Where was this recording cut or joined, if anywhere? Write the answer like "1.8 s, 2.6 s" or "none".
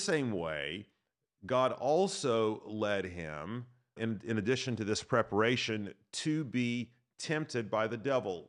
4.0 s